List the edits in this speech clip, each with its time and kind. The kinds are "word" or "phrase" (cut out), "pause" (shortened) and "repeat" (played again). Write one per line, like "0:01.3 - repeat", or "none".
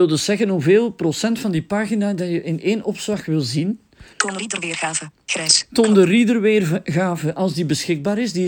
0:04.1 - pause